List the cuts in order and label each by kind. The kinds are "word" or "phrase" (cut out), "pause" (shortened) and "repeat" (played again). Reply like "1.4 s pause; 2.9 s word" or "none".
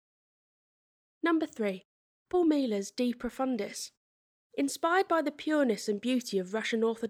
none

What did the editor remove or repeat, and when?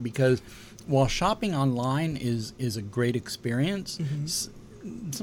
none

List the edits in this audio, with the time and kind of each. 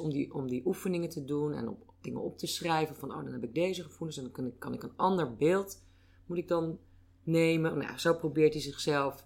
none

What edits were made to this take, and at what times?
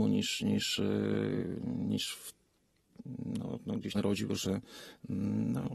3.9 s phrase; 4.3 s word

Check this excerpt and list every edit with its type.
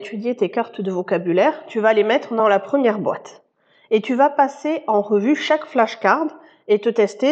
none

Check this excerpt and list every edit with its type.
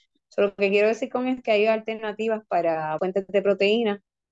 1.4 s word; 3.0 s word

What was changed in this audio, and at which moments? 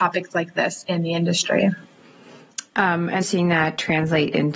3.2 s phrase

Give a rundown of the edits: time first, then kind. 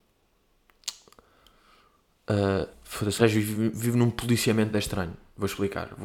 2.7 s word; 3.2 s word; 4.7 s word

